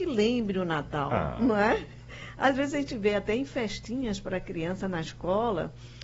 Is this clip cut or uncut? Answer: uncut